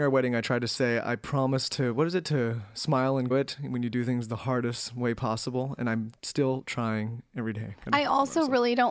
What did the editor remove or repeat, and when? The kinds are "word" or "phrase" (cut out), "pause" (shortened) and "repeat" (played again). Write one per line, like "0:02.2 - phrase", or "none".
0:03.3 - phrase